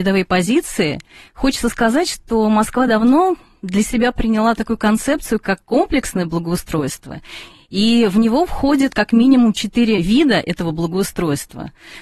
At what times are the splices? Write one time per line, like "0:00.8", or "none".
none